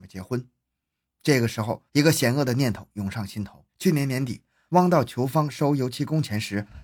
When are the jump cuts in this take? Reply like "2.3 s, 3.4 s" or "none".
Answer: 1.9 s, 3.7 s